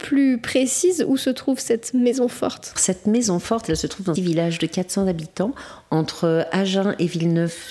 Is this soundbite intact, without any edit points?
no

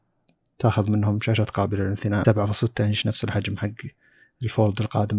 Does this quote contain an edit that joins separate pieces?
yes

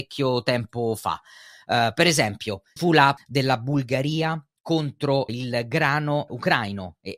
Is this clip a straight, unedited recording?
no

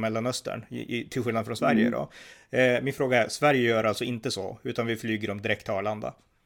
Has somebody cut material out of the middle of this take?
no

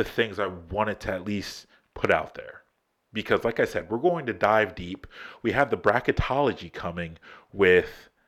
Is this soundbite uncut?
yes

